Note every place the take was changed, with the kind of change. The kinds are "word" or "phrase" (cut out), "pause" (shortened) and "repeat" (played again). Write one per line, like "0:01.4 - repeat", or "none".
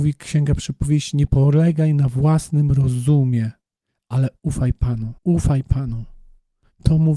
0:05.2 - pause